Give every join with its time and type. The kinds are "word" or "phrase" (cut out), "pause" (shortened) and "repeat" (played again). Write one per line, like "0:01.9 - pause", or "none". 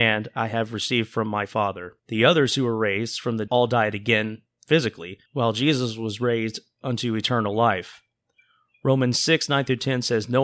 0:02.0 - pause
0:03.5 - word
0:05.3 - pause